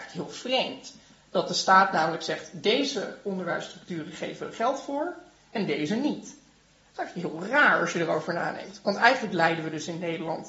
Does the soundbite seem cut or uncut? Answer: uncut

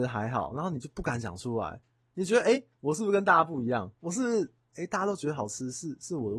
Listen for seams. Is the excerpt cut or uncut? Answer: uncut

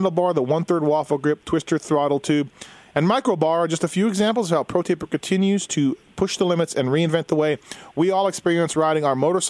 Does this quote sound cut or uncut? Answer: uncut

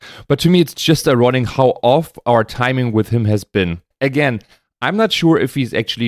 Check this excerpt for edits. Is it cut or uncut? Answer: cut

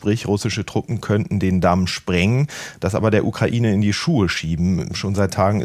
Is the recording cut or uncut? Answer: uncut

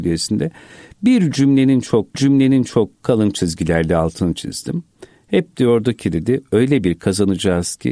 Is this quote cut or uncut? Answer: cut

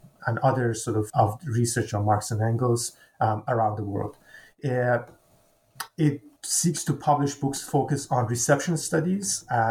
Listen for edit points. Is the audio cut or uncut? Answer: cut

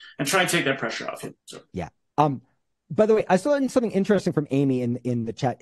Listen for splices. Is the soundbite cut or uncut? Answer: cut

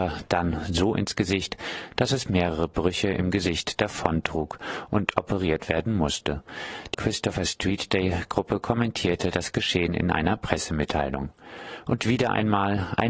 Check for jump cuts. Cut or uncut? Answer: cut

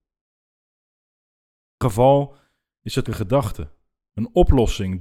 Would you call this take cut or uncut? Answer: cut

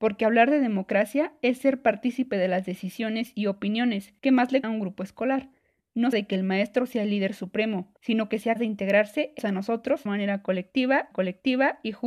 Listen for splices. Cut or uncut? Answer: cut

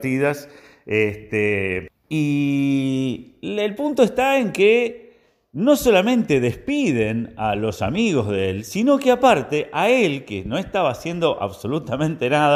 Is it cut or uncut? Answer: uncut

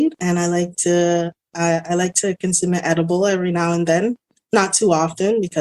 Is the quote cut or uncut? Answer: uncut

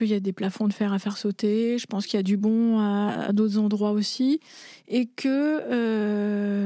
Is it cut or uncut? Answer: uncut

